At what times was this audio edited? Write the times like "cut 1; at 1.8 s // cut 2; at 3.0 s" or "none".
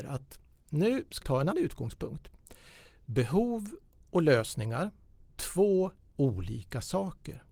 cut 1; at 1.2 s // cut 2; at 1.5 s // cut 3; at 5.3 s // cut 4; at 6.1 s